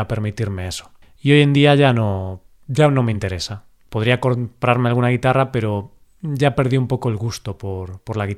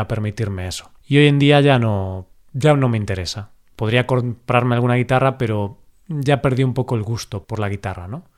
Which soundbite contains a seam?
second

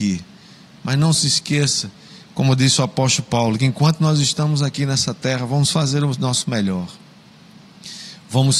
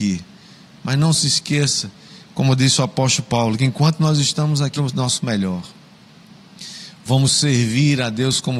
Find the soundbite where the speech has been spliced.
second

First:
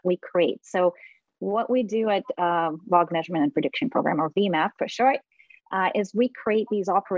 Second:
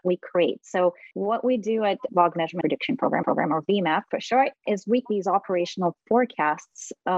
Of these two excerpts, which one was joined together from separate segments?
second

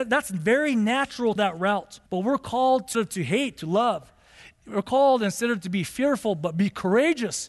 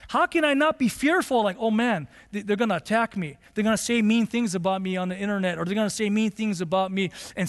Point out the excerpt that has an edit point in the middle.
first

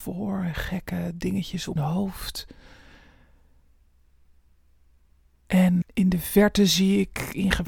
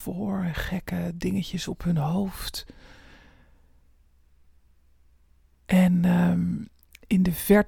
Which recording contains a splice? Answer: first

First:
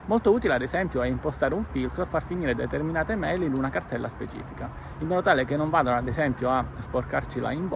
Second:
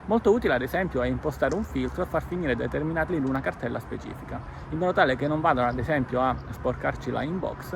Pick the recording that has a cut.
second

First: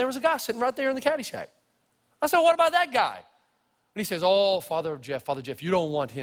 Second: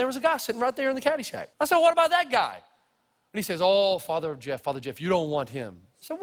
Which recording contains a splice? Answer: second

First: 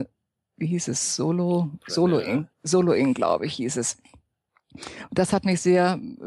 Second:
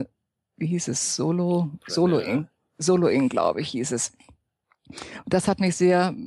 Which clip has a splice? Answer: first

